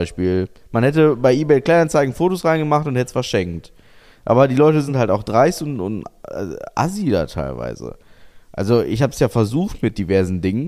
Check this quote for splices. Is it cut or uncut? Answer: uncut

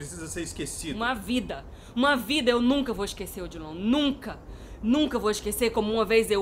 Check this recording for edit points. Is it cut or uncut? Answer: uncut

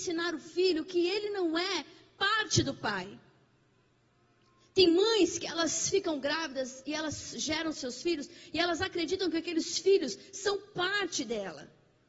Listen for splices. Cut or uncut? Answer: uncut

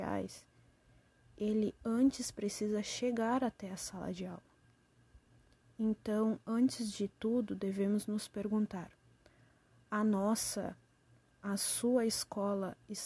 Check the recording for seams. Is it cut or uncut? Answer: uncut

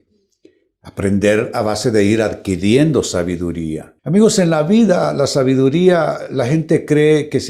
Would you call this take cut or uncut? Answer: cut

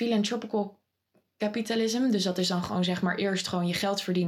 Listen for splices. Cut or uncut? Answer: uncut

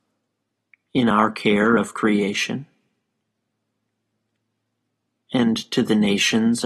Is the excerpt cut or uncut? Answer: uncut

